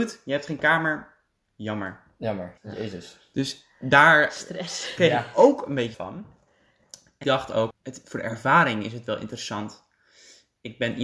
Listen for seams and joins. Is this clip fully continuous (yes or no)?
no